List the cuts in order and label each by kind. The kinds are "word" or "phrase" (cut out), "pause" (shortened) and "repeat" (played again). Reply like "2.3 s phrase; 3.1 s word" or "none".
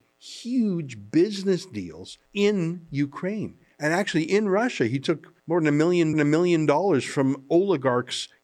2.3 s pause; 5.4 s pause; 6.1 s repeat